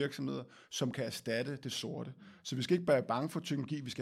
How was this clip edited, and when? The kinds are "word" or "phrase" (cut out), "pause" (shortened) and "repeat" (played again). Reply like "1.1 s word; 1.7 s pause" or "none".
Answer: none